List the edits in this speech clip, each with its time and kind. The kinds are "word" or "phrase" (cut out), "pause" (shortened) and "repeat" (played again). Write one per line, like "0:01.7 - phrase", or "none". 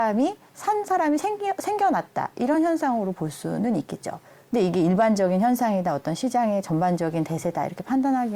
none